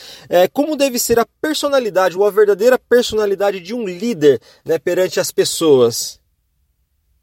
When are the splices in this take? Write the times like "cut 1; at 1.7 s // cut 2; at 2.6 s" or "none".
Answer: none